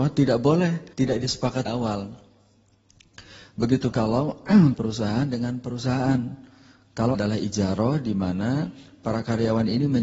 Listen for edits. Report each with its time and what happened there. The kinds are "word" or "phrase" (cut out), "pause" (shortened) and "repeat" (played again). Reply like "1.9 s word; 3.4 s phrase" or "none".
0.9 s pause; 1.7 s word; 3.9 s word; 4.7 s phrase; 7.1 s word